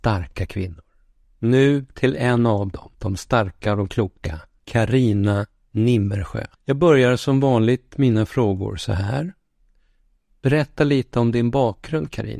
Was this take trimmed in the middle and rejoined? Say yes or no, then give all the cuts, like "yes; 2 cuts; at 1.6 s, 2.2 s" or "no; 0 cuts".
yes; 4 cuts; at 1.2 s, 2.9 s, 4.6 s, 6.5 s